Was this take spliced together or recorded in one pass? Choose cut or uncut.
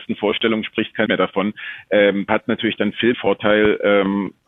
cut